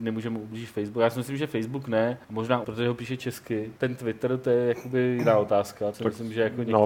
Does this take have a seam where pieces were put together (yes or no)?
yes